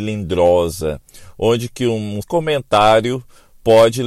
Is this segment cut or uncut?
cut